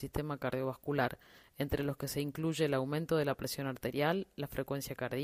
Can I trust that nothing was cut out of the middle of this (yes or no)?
yes